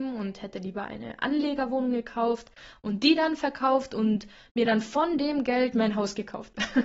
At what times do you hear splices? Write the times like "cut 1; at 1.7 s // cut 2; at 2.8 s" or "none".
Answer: none